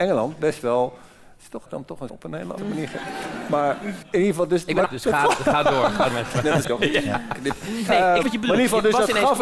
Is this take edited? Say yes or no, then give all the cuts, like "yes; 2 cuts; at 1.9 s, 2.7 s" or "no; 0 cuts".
yes; 9 cuts; at 1.7 s, 2.1 s, 2.6 s, 4.0 s, 4.9 s, 6.1 s, 6.6 s, 7.9 s, 8.2 s